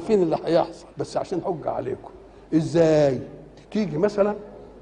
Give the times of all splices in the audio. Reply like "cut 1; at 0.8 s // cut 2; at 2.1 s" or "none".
cut 1; at 0.9 s // cut 2; at 1.4 s // cut 3; at 3.6 s